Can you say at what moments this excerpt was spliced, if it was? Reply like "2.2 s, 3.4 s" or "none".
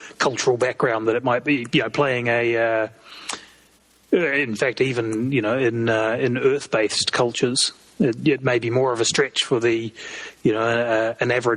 none